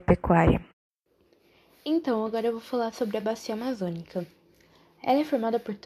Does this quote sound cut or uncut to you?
uncut